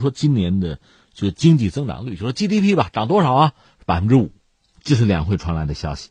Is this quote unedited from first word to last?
yes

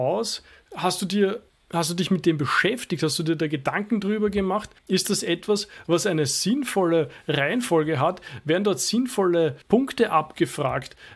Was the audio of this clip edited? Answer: yes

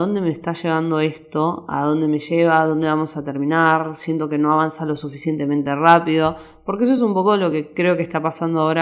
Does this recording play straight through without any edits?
yes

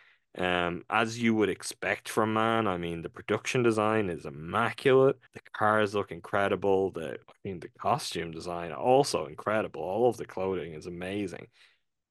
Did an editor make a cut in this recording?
yes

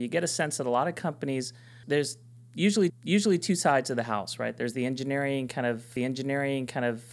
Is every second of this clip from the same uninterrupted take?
no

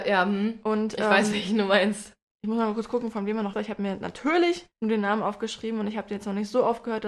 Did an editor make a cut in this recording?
yes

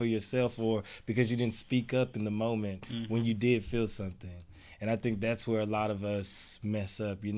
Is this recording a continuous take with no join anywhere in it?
yes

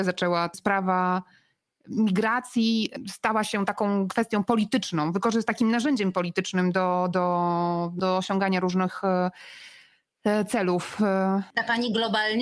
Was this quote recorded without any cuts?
yes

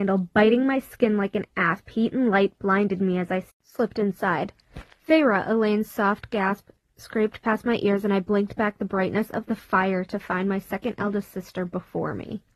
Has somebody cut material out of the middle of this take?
no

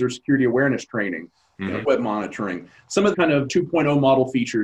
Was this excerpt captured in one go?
no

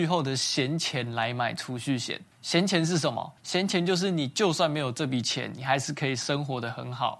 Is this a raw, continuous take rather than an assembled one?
no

